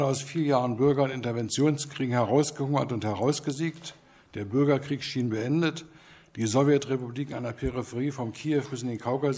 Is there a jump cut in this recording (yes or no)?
no